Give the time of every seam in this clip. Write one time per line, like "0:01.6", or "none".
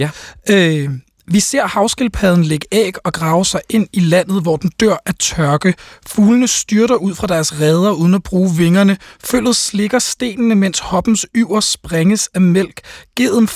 none